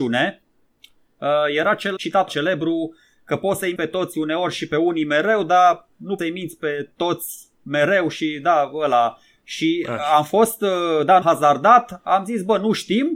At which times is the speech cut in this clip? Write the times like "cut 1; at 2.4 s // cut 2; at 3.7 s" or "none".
cut 1; at 2.0 s // cut 2; at 2.3 s // cut 3; at 3.8 s // cut 4; at 6.2 s // cut 5; at 11.2 s

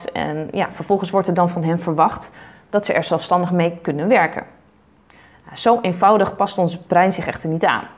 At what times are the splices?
none

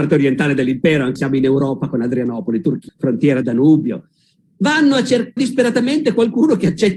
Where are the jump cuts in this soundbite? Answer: cut 1; at 1.2 s // cut 2; at 2.9 s // cut 3; at 3.4 s // cut 4; at 5.4 s

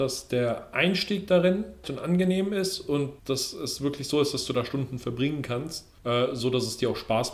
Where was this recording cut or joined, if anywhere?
cut 1; at 1.8 s // cut 2; at 3.2 s // cut 3; at 6.0 s

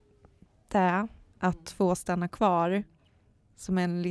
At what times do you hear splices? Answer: none

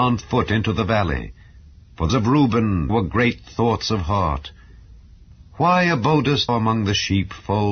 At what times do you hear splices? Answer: cut 1; at 2.1 s // cut 2; at 2.9 s // cut 3; at 6.5 s

